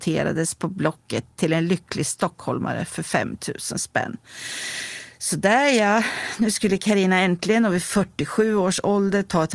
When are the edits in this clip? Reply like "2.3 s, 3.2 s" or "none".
none